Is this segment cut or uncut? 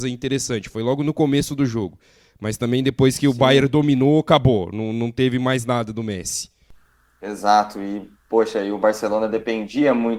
uncut